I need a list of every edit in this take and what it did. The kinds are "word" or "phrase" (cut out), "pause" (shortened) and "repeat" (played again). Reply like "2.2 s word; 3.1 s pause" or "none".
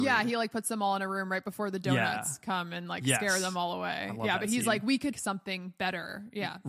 5.1 s word

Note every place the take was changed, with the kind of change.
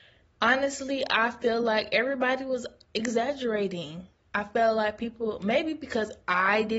none

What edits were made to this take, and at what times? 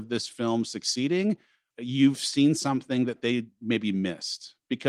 1.7 s phrase

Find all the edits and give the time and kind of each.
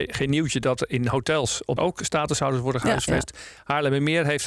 1.8 s phrase

